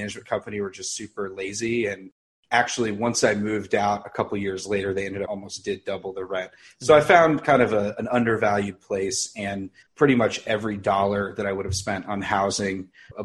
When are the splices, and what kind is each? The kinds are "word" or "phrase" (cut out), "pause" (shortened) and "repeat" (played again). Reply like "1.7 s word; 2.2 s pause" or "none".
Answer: 5.3 s phrase; 9.8 s phrase